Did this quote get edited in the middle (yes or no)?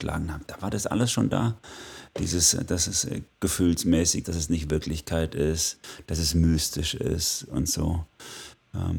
yes